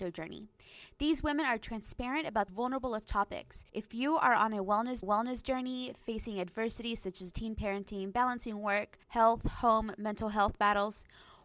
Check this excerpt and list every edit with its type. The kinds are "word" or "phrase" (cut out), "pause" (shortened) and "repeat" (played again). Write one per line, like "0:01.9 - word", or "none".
0:02.5 - phrase
0:03.7 - pause
0:05.0 - repeat
0:07.3 - word
0:09.0 - pause